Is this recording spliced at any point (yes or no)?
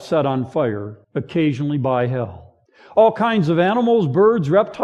yes